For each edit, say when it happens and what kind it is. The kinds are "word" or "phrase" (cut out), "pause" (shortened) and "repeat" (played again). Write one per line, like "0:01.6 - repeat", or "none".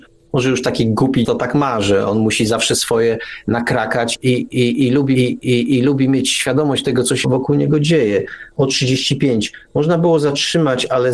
0:01.2 - word
0:04.1 - word
0:05.2 - repeat
0:07.2 - word